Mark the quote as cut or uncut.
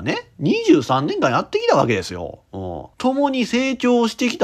cut